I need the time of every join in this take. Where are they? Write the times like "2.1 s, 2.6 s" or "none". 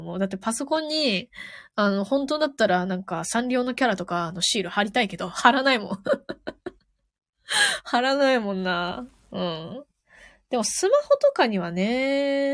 6.8 s